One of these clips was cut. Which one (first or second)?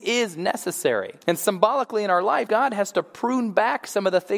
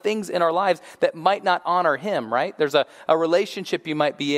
first